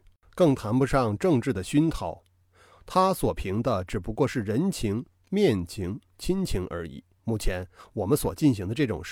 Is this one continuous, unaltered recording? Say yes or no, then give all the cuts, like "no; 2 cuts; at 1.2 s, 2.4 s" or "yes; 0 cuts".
no; 1 cut; at 7.2 s